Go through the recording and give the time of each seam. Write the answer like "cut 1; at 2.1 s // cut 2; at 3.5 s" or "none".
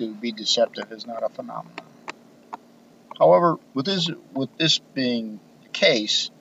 cut 1; at 3.7 s // cut 2; at 4.5 s